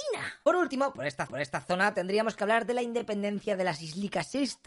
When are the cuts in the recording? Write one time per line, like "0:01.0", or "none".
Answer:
0:01.3